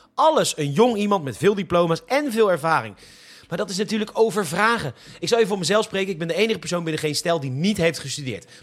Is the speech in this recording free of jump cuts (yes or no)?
yes